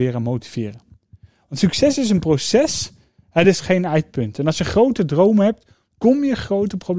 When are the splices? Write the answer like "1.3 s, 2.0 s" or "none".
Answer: none